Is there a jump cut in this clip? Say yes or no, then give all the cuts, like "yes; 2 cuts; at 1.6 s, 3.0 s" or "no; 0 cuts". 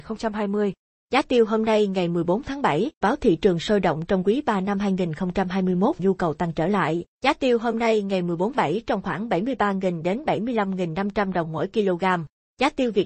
yes; 4 cuts; at 3.0 s, 6.0 s, 7.1 s, 8.5 s